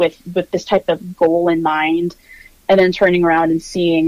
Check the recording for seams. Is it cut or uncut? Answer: uncut